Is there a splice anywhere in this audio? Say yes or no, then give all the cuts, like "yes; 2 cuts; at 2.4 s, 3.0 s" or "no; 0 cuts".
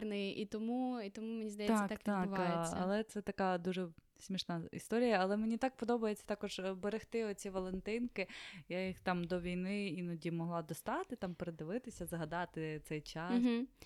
no; 0 cuts